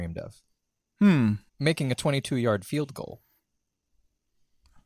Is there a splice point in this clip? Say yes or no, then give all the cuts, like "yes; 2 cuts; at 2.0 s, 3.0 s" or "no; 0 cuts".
yes; 1 cut; at 1.5 s